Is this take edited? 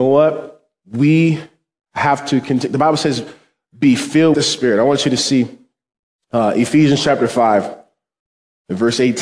yes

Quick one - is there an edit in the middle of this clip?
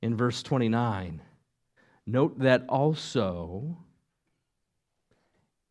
no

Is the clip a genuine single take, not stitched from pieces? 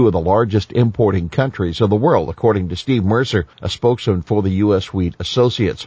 no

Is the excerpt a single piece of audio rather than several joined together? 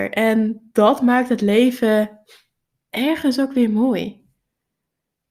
yes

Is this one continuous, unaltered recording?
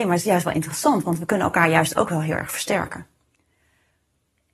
yes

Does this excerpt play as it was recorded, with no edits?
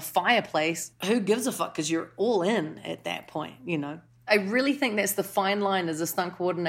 yes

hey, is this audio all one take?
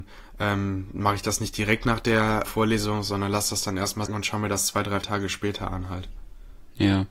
no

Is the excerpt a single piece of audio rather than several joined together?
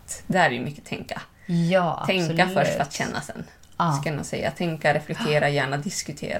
yes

